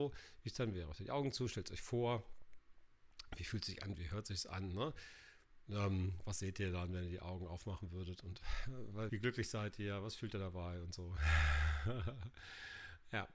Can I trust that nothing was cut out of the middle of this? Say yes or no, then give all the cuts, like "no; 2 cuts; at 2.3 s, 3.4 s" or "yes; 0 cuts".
no; 1 cut; at 9.1 s